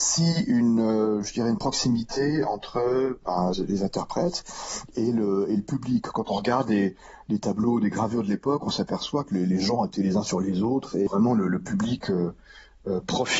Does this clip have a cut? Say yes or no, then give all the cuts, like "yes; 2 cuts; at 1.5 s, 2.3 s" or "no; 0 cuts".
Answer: yes; 1 cut; at 3.5 s